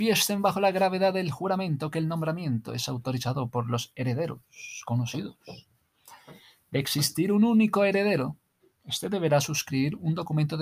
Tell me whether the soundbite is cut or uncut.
uncut